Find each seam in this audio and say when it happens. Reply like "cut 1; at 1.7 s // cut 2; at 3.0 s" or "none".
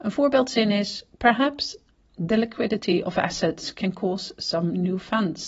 none